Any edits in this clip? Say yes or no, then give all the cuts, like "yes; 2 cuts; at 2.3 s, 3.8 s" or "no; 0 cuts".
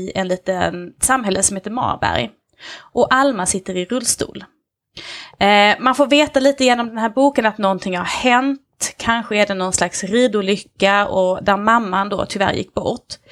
no; 0 cuts